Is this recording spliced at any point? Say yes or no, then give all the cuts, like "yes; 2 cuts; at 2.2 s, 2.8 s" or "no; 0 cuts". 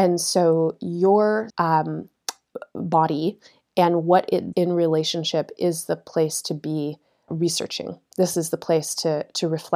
yes; 3 cuts; at 1.5 s, 4.5 s, 7.3 s